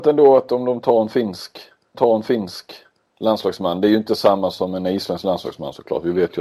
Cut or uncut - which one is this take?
cut